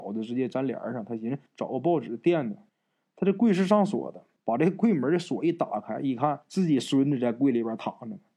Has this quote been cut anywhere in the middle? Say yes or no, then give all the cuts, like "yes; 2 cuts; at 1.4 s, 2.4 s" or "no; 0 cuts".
yes; 4 cuts; at 1.5 s, 2.7 s, 4.4 s, 6.4 s